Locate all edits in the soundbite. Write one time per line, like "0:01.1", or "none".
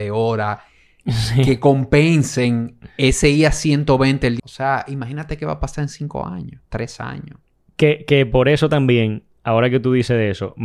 0:04.4
0:06.7